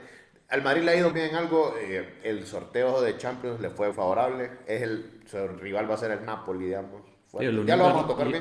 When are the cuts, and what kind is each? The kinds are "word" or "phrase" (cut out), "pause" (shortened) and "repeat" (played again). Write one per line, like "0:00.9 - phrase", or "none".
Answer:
0:01.1 - word
0:02.2 - word
0:03.9 - word